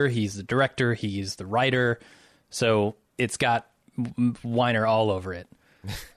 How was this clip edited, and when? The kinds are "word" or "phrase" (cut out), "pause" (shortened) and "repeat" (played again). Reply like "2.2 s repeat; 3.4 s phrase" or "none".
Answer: none